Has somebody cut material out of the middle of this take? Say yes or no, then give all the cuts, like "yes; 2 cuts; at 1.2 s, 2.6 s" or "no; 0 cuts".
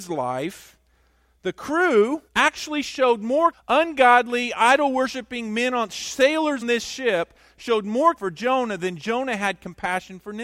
yes; 4 cuts; at 2.3 s, 3.5 s, 6.6 s, 8.2 s